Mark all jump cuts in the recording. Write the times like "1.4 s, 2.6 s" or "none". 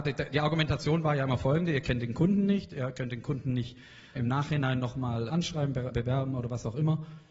4.2 s, 5.3 s, 5.9 s

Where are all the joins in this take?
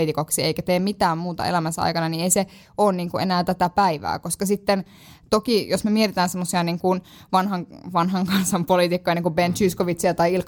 none

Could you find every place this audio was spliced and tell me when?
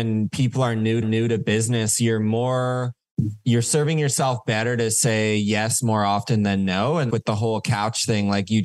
1.0 s, 7.1 s

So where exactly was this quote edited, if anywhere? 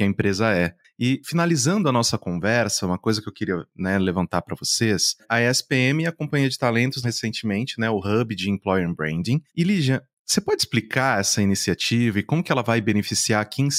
7.0 s

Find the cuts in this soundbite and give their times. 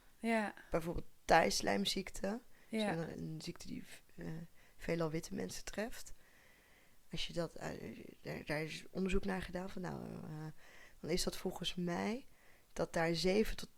3.1 s

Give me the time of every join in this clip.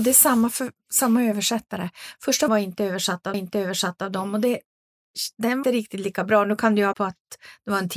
2.5 s, 3.3 s, 5.6 s, 6.9 s

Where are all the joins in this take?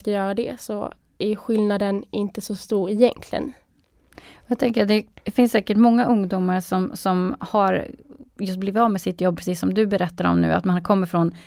none

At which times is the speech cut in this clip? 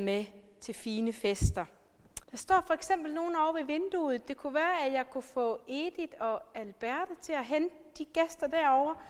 2.2 s

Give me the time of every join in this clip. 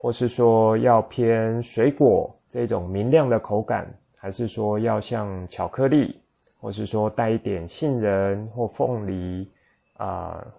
none

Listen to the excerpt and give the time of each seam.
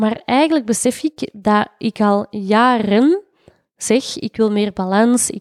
none

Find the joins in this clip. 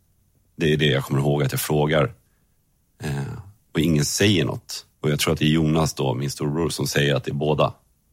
4.9 s

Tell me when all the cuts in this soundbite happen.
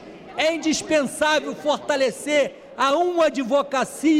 none

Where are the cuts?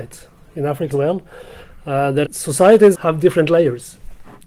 0.9 s, 2.2 s, 2.9 s

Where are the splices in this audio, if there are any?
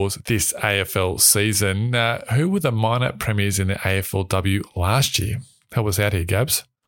none

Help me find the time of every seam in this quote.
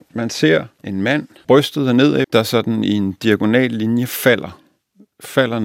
1.4 s, 2.2 s

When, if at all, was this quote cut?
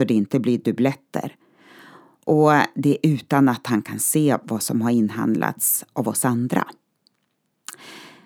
none

